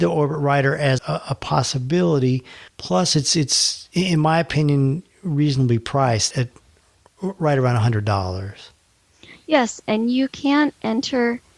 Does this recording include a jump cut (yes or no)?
yes